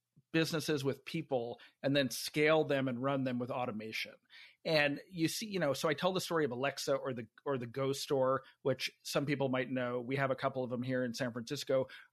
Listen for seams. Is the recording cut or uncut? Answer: uncut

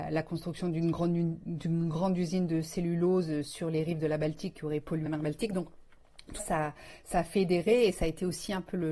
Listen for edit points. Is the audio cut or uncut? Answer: cut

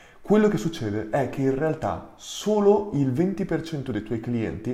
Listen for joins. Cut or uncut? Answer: uncut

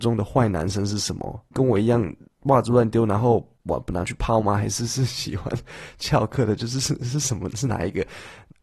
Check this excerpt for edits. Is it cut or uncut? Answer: uncut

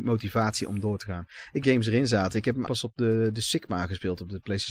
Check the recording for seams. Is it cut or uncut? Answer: cut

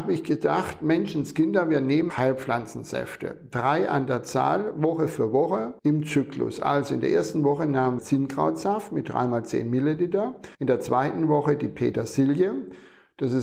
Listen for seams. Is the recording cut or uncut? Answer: cut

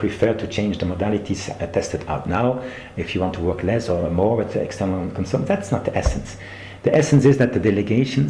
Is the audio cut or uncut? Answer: uncut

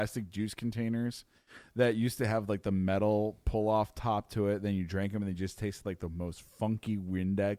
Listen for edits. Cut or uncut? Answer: uncut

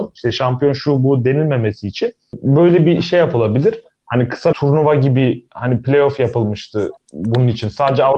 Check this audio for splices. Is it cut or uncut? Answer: cut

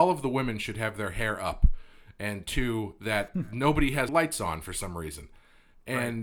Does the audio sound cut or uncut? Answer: cut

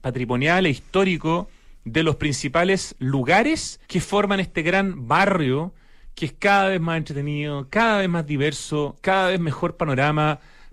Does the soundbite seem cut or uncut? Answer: cut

